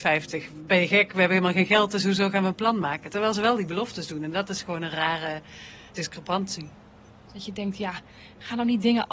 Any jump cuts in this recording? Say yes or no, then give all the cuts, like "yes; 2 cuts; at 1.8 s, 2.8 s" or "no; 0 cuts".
no; 0 cuts